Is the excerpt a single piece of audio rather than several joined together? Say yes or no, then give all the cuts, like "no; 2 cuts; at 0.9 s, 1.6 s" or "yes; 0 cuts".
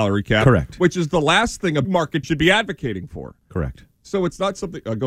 no; 2 cuts; at 1.8 s, 2.2 s